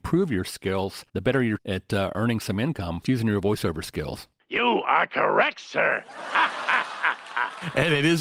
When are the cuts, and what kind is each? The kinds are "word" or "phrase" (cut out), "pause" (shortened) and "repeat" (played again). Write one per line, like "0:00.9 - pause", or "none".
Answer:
0:01.1 - pause
0:01.6 - word
0:03.0 - word

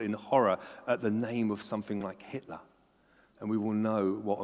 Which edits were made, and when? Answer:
none

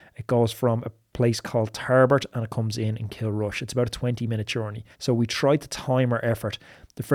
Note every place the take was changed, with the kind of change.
0:04.9 - pause

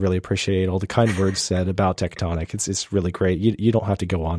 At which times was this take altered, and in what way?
0:01.4 - word

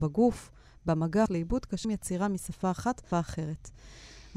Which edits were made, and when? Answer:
0:01.3 - word
0:01.8 - word
0:03.1 - word

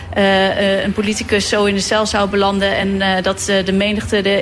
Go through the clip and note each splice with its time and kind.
none

